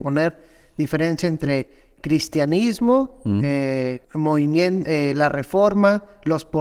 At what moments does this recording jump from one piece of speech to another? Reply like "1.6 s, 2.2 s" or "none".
4.0 s